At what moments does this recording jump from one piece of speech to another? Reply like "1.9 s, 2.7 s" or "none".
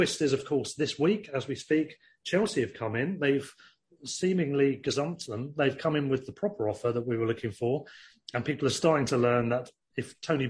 none